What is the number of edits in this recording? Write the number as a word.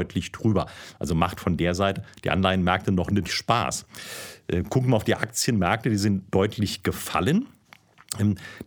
one